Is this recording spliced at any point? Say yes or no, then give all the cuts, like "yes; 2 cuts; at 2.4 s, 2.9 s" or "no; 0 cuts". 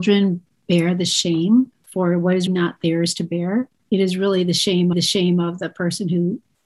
yes; 2 cuts; at 2.5 s, 4.9 s